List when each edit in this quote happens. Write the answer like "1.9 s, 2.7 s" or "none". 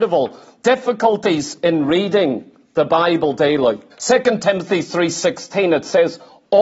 3.9 s